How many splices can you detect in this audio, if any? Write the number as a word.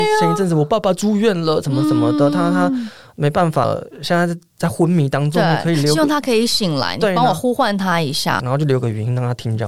one